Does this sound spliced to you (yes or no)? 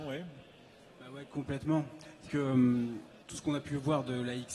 yes